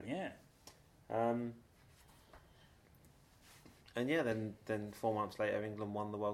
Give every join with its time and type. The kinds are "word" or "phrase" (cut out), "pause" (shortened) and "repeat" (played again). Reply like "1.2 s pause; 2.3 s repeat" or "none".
none